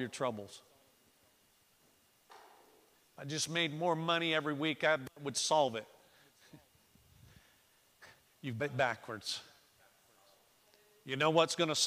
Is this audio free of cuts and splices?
no; 1 cut; at 8.6 s

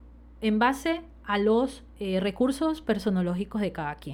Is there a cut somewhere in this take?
no; 0 cuts

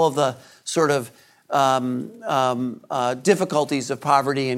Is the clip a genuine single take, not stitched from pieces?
yes; 0 cuts

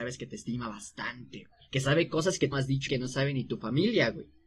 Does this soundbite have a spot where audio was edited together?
yes; 3 cuts; at 1.7 s, 2.5 s, 2.9 s

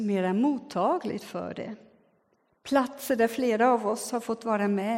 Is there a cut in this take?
no; 0 cuts

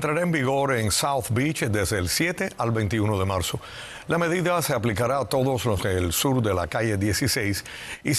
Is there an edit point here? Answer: yes; 1 cut; at 5.8 s

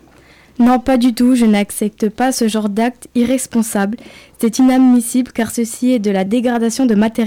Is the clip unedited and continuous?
yes; 0 cuts

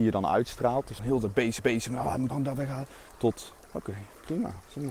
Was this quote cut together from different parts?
yes; 3 cuts; at 1.0 s, 1.6 s, 2.3 s

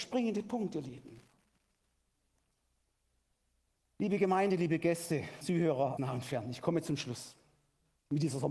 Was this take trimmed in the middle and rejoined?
yes; 2 cuts; at 5.4 s, 6.0 s

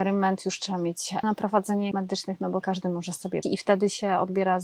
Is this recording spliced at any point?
yes; 4 cuts; at 1.2 s, 1.9 s, 2.6 s, 3.4 s

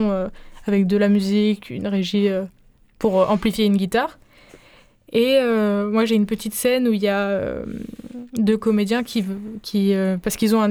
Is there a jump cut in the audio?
no; 0 cuts

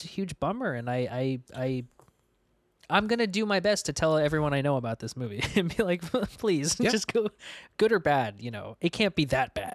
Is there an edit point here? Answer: no; 0 cuts

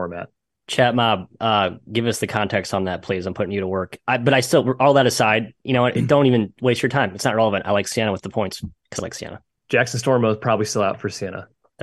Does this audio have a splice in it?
yes; 2 cuts; at 9.0 s, 9.5 s

